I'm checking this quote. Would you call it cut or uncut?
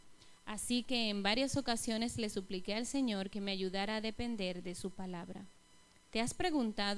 uncut